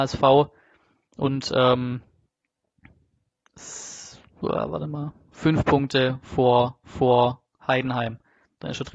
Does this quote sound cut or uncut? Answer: cut